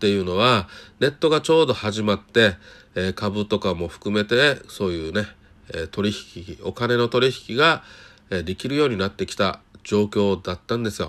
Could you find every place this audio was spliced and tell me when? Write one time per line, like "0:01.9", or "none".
none

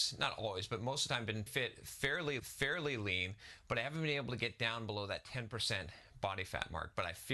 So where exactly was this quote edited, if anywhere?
0:01.5
0:02.4

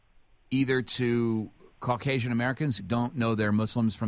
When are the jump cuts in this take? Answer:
0:02.8

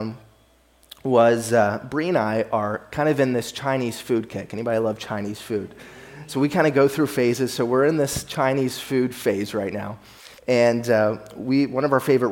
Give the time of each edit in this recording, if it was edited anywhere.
0:10.4

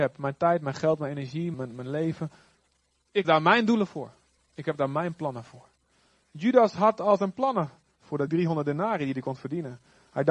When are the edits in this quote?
0:01.5
0:03.2
0:08.3

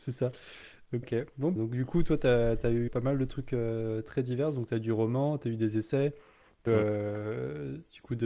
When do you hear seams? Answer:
0:01.0
0:01.6
0:02.9
0:06.7

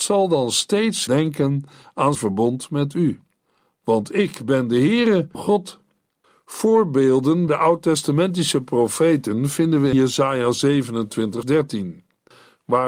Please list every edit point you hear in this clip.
0:01.1
0:02.1
0:05.3
0:07.5
0:09.9
0:11.4

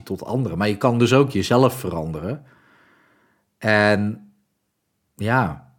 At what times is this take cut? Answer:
none

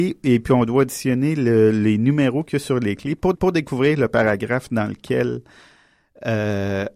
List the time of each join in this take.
0:03.3

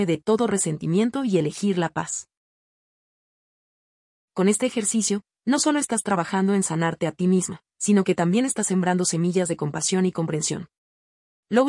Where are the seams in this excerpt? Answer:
none

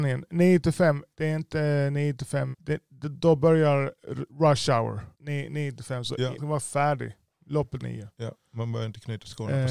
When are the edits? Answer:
0:01.1
0:02.5
0:04.3
0:05.1
0:06.4
0:07.8

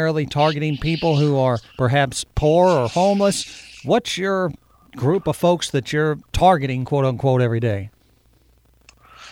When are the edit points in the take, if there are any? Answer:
0:01.7
0:06.2

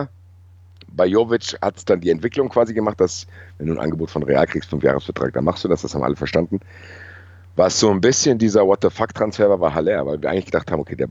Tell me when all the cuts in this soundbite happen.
none

